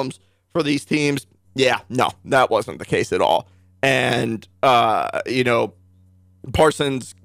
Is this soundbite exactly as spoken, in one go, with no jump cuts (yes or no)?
yes